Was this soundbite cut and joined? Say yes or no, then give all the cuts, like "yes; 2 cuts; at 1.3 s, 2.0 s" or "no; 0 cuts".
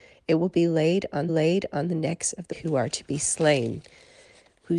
yes; 2 cuts; at 1.3 s, 2.5 s